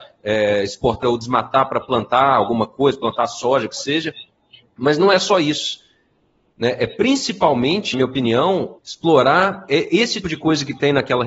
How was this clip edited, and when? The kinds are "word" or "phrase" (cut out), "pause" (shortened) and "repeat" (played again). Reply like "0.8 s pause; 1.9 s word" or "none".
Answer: 1.0 s word; 7.9 s word; 8.8 s word; 10.2 s word